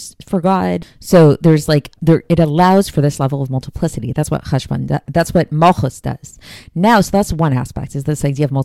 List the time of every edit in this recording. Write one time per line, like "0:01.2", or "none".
0:02.0